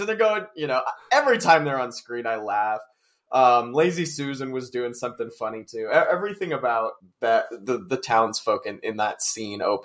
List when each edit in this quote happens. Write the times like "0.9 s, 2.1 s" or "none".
7.0 s